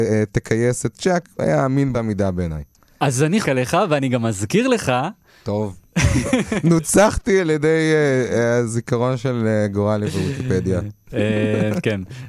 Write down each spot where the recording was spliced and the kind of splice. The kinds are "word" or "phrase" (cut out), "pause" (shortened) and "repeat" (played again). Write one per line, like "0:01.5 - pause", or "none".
0:01.4 - word
0:01.9 - word
0:03.4 - word